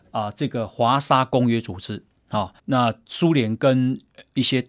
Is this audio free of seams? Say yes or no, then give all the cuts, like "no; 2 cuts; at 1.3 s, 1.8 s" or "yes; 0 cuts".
no; 1 cut; at 2.6 s